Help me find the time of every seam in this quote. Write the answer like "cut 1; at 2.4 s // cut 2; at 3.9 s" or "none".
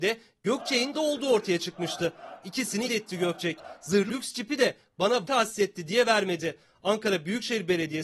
cut 1; at 0.9 s // cut 2; at 2.9 s // cut 3; at 4.1 s // cut 4; at 5.2 s